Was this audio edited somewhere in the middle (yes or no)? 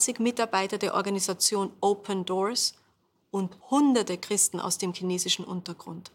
yes